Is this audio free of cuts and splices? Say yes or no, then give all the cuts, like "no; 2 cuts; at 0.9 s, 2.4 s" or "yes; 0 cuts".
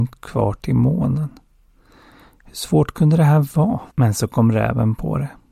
no; 1 cut; at 3.9 s